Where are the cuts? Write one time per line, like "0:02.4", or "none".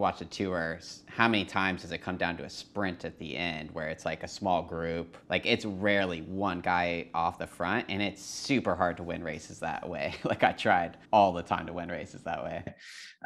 0:05.2
0:11.0